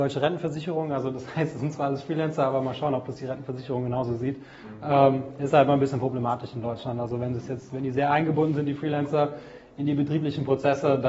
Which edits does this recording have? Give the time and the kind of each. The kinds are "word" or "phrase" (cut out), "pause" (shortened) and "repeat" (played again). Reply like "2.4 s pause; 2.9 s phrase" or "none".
none